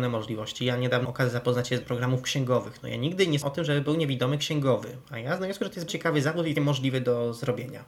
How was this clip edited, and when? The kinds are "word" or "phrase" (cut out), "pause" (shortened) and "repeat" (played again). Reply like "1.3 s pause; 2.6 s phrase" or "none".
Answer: 1.0 s word; 1.8 s word; 3.4 s word; 5.4 s word; 5.9 s word; 6.6 s word